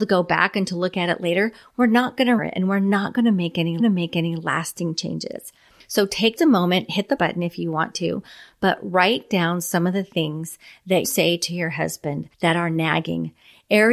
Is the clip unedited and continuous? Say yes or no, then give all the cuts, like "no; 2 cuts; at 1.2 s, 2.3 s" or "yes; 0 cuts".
no; 6 cuts; at 2.4 s, 3.8 s, 6.4 s, 7.2 s, 11.0 s, 12.3 s